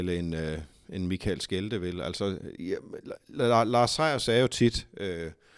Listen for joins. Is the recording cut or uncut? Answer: uncut